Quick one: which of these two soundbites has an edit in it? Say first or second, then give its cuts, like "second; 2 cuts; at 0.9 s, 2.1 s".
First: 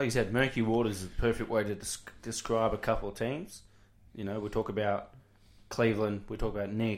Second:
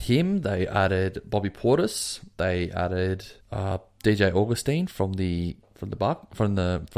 second; 2 cuts; at 2.3 s, 3.4 s